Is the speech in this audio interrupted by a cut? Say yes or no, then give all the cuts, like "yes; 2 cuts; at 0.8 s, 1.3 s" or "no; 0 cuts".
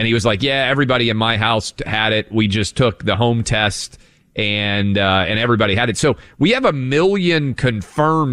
no; 0 cuts